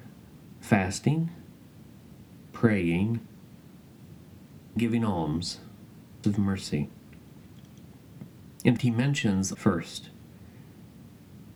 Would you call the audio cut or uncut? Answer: cut